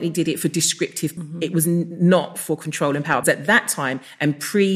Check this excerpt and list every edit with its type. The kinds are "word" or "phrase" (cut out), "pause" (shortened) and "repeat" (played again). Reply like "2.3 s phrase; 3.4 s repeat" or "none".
1.2 s word; 3.2 s word